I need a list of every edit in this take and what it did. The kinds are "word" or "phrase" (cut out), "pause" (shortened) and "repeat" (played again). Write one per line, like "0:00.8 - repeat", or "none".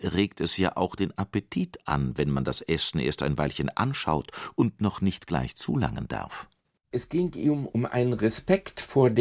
none